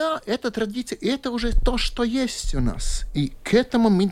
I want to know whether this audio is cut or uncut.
uncut